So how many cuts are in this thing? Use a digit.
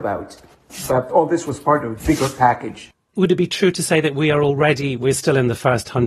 2